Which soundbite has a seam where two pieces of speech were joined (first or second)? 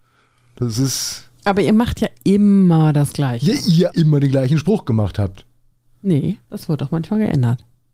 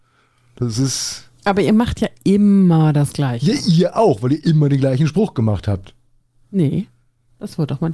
first